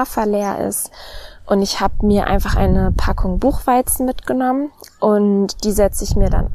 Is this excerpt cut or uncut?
uncut